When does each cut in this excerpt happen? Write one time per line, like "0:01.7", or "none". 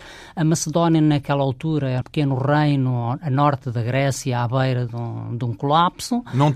0:02.0